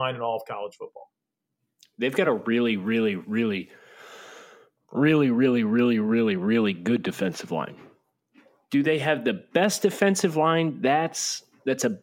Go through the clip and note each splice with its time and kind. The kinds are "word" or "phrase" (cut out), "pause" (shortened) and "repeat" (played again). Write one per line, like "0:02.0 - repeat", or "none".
none